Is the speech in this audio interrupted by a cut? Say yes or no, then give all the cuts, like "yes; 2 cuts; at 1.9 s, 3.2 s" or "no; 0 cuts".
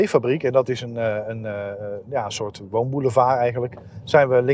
no; 0 cuts